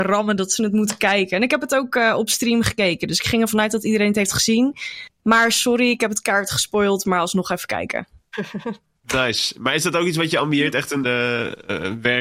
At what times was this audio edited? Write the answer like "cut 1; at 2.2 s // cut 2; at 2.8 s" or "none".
cut 1; at 11.0 s